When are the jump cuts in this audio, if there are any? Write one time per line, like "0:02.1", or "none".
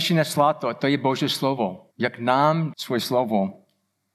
0:01.9
0:02.7